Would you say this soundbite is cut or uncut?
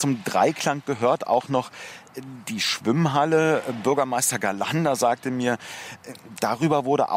uncut